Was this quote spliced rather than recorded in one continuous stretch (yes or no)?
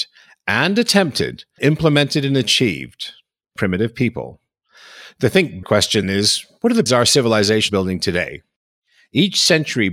yes